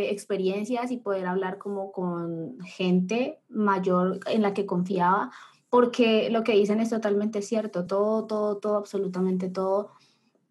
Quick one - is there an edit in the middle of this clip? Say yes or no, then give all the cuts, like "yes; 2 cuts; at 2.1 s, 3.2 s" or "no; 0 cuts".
no; 0 cuts